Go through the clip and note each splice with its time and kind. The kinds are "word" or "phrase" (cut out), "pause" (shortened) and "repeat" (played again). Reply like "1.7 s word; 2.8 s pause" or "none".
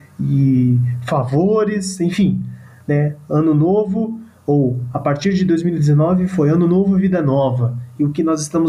none